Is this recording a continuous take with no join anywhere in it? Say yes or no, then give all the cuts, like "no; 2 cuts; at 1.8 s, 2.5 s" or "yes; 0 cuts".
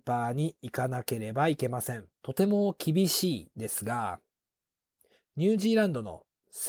no; 1 cut; at 2.1 s